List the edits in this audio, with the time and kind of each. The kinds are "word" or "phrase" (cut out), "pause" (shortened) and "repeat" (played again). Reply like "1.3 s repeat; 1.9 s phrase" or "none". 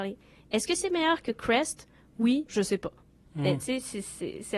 2.5 s word